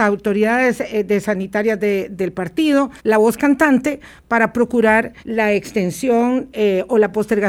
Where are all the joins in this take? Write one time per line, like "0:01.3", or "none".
0:03.0
0:05.2